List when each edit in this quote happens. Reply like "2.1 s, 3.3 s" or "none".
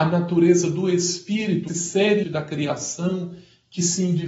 1.7 s, 2.2 s